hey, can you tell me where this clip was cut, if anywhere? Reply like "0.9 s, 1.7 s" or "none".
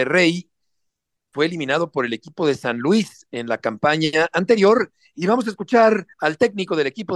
6.1 s